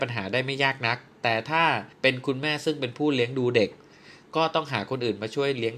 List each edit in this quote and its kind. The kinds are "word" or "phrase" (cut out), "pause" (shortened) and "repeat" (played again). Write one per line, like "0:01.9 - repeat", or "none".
0:01.9 - pause